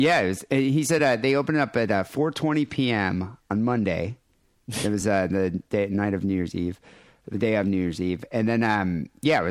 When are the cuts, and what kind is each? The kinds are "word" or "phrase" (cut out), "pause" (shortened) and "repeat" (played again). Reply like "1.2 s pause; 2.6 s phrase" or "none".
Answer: none